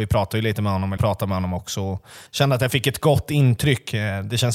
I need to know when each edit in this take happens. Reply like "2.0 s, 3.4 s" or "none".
1.0 s, 2.3 s